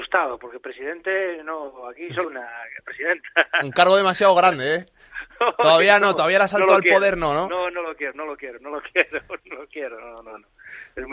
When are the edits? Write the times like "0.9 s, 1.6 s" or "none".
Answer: 2.2 s